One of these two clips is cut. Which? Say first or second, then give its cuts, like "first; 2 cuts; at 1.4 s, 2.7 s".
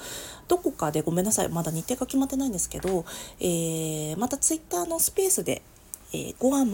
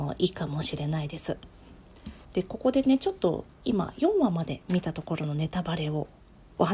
second; 1 cut; at 2.2 s